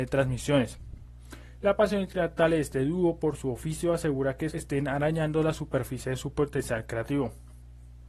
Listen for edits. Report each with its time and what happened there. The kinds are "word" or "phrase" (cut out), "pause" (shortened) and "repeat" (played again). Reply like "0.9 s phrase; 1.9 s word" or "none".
4.5 s word